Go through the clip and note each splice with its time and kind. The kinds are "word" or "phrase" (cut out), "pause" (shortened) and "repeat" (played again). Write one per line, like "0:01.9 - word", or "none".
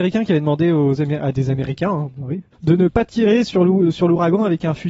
0:02.5 - pause